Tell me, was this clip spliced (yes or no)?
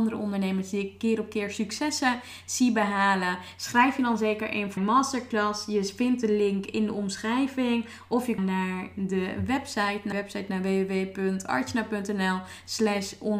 yes